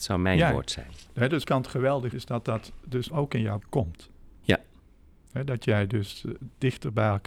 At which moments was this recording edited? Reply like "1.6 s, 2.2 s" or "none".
1.1 s, 1.4 s, 2.1 s, 3.1 s, 3.6 s